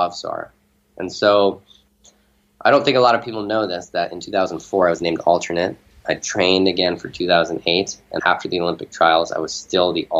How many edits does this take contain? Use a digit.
1